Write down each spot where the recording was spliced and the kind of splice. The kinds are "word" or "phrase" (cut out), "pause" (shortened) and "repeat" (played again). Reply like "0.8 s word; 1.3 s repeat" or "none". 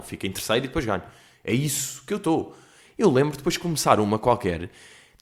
none